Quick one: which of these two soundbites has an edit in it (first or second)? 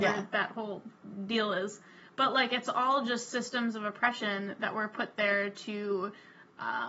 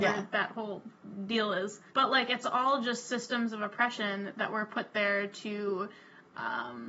second